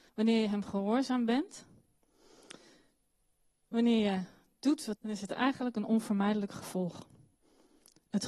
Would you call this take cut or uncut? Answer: cut